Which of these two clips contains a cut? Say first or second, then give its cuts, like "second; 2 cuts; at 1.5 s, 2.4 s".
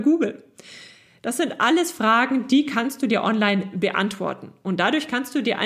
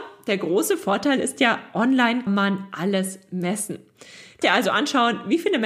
second; 2 cuts; at 2.3 s, 4.4 s